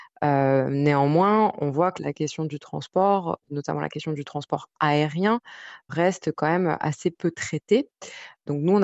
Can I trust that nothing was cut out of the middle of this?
yes; 0 cuts

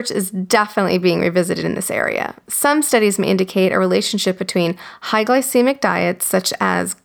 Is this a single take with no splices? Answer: yes; 0 cuts

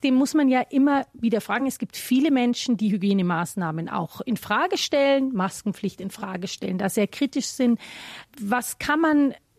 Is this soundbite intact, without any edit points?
yes; 0 cuts

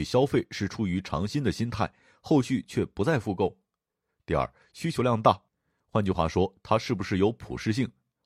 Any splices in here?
no; 0 cuts

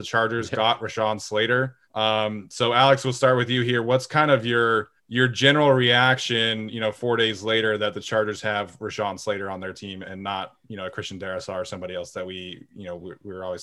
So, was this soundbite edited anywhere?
yes; 2 cuts; at 1.8 s, 5.0 s

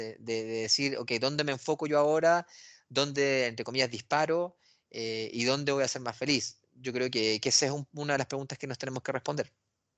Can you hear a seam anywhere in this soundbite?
no; 0 cuts

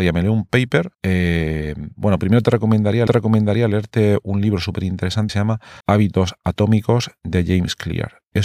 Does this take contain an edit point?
yes; 4 cuts; at 0.9 s, 3.1 s, 5.3 s, 5.8 s

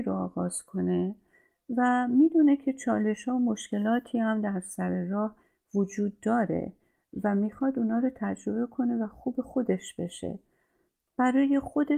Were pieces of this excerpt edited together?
no; 0 cuts

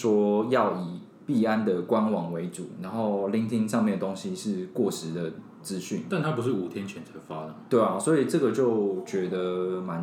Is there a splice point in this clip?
no; 0 cuts

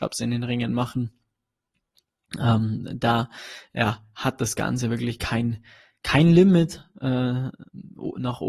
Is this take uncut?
yes; 0 cuts

